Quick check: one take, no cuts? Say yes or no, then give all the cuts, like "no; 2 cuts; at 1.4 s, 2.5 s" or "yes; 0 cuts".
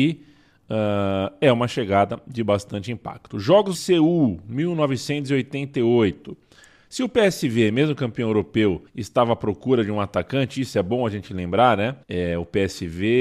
no; 3 cuts; at 3.7 s, 8.9 s, 12.0 s